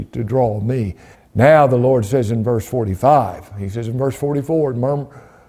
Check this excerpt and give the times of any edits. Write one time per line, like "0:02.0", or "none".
0:01.1